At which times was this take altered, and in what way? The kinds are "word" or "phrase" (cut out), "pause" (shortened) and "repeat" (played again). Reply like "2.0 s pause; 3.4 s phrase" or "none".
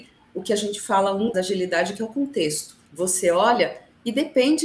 1.3 s phrase; 2.9 s pause